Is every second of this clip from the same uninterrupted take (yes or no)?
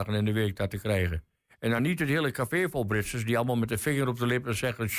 yes